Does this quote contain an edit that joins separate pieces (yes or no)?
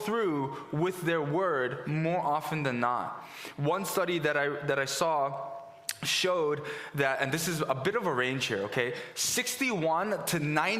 no